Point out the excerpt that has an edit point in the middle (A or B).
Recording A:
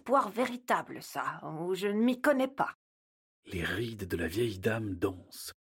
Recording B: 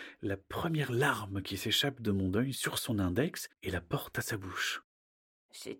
B